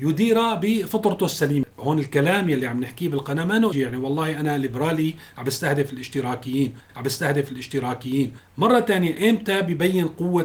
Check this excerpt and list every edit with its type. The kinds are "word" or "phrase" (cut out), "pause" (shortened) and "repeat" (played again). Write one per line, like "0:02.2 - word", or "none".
0:03.7 - word
0:06.9 - repeat